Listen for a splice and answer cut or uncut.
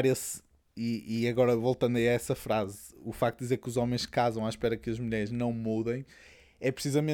uncut